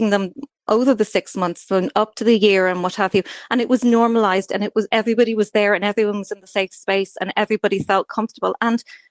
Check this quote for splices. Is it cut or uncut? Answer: uncut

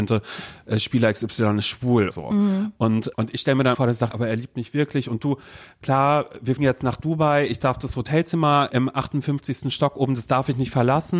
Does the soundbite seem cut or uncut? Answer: cut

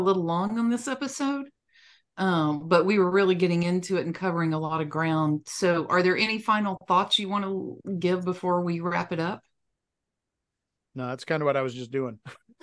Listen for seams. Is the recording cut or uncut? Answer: uncut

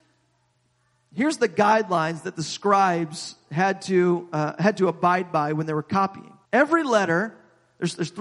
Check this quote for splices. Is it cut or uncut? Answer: cut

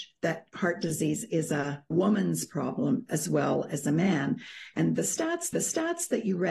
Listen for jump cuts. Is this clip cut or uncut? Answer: cut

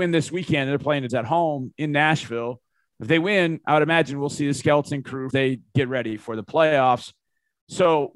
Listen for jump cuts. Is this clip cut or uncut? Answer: cut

